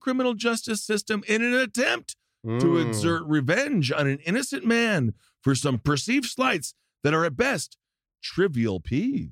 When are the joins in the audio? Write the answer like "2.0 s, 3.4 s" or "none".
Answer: none